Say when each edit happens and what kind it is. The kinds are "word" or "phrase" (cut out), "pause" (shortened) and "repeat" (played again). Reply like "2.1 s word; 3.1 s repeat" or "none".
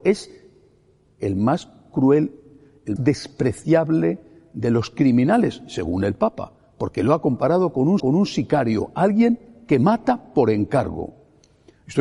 3.0 s word; 8.0 s repeat